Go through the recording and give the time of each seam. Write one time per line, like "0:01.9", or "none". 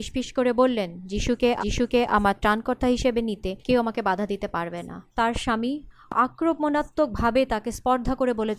0:01.6
0:03.6
0:05.1